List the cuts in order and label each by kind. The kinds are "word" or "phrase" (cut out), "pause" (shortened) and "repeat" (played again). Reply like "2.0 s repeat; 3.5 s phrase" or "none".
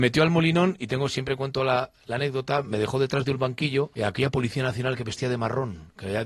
3.9 s pause